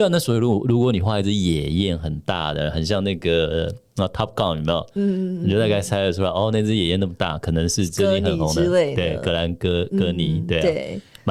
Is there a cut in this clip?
no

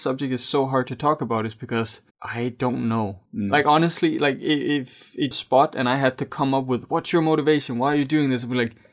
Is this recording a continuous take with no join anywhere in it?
no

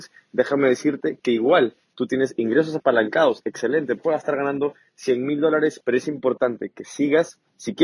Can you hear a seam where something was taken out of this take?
yes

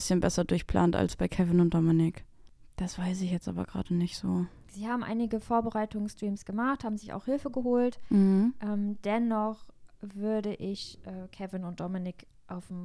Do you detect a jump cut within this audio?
no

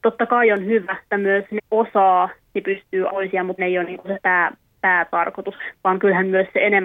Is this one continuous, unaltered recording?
no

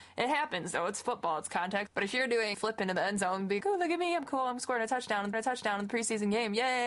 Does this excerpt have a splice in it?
yes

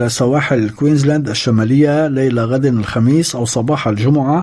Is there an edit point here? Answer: no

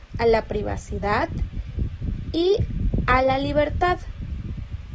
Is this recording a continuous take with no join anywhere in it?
yes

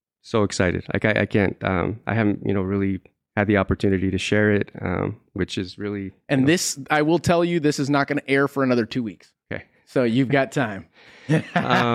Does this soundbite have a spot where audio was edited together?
no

